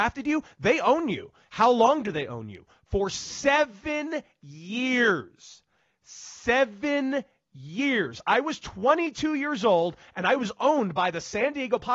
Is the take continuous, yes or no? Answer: yes